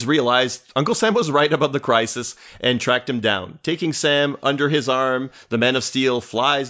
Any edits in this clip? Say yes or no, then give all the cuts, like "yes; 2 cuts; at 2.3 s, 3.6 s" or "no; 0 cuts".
no; 0 cuts